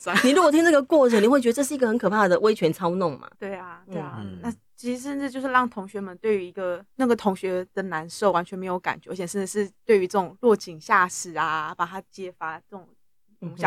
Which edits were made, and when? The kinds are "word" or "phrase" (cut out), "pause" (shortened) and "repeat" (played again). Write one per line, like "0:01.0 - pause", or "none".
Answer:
0:03.3 - pause
0:06.9 - pause
0:10.4 - pause